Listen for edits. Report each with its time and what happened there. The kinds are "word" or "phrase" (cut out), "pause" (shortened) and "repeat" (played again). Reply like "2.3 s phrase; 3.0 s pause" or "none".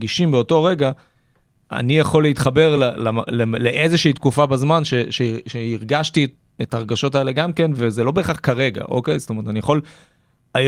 none